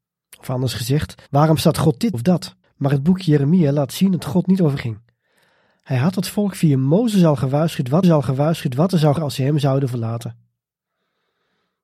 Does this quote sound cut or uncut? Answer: cut